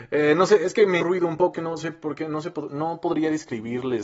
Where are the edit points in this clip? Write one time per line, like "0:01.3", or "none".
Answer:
0:01.0
0:01.5

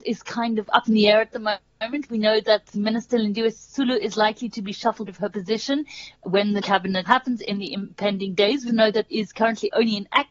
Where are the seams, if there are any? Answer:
0:02.8
0:05.1
0:06.6
0:07.1
0:08.7
0:09.1

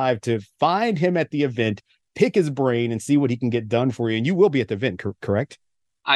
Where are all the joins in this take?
none

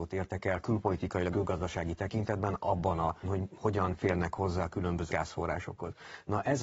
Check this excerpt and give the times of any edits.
0:01.3
0:03.2
0:05.1

